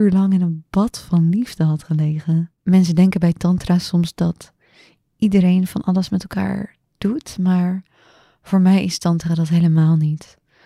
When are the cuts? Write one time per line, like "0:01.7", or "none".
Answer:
0:02.6